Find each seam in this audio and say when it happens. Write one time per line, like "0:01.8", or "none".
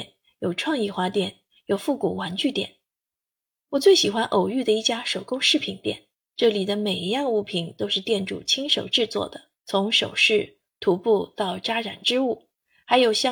0:06.1
0:09.6